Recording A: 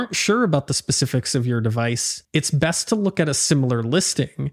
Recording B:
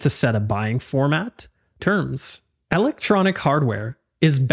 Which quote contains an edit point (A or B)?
B